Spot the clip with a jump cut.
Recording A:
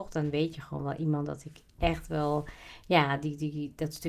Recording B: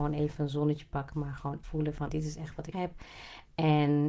B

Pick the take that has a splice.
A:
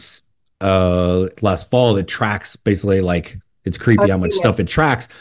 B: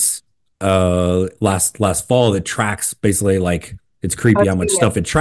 A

